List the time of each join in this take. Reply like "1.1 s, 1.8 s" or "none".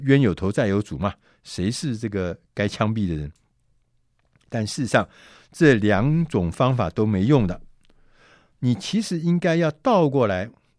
none